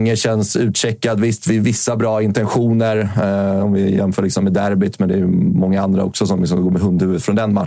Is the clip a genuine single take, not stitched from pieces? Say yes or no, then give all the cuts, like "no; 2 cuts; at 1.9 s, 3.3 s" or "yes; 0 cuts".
yes; 0 cuts